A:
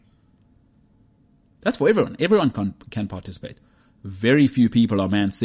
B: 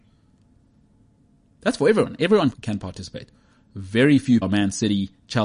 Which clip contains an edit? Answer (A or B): B